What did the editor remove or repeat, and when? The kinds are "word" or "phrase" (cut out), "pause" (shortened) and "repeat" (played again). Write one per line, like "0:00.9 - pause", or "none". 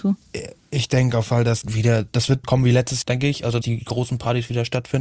0:01.3 - word
0:01.6 - word
0:02.4 - word
0:03.0 - word
0:03.6 - word